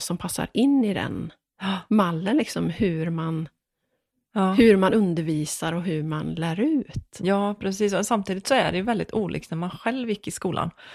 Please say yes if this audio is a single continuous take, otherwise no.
yes